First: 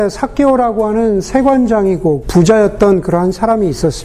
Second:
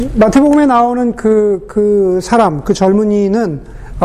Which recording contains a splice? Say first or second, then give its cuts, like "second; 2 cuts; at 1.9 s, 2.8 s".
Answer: first; 1 cut; at 2.2 s